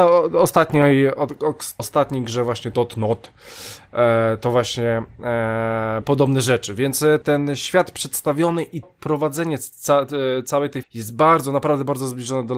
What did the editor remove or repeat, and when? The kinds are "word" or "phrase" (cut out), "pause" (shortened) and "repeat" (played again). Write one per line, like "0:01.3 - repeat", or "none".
0:01.8 - word
0:02.7 - word
0:06.0 - word
0:07.2 - word
0:08.8 - word
0:10.8 - word